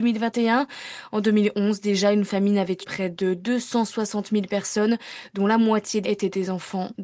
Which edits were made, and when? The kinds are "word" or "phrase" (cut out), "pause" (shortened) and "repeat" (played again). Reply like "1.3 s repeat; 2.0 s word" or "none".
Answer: 2.8 s word; 6.0 s phrase